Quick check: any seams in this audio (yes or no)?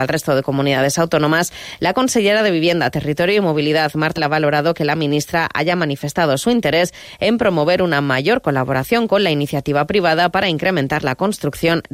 yes